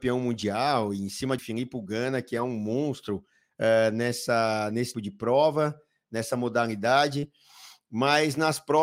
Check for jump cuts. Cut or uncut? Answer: cut